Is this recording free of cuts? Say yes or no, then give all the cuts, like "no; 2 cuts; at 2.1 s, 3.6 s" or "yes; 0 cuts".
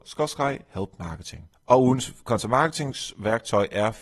yes; 0 cuts